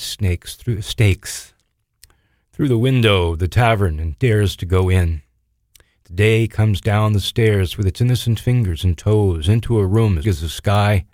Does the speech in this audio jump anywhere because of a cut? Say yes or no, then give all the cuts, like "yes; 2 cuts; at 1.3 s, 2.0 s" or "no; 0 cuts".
yes; 1 cut; at 10.2 s